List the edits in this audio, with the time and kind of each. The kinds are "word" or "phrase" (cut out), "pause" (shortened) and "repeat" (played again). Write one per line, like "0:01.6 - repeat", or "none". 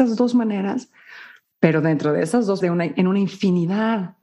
0:02.6 - word